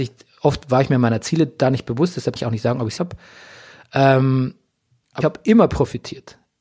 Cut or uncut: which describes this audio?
cut